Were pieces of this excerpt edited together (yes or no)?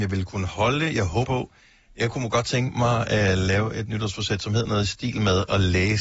yes